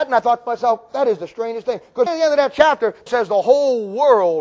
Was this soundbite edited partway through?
yes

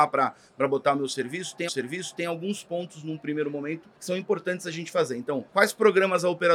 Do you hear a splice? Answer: yes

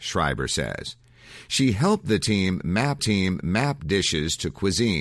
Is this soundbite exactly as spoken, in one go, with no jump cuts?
no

